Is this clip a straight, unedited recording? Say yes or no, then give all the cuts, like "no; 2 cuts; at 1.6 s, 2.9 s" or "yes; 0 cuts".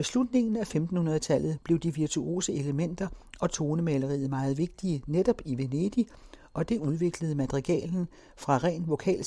yes; 0 cuts